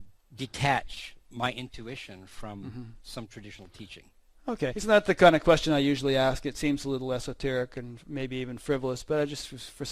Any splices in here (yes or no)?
yes